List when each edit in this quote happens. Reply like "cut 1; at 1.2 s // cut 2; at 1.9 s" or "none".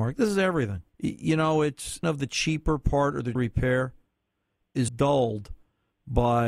cut 1; at 0.9 s // cut 2; at 2.0 s // cut 3; at 3.4 s // cut 4; at 4.9 s